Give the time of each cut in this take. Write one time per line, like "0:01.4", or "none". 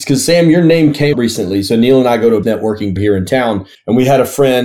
0:01.1
0:02.4
0:03.0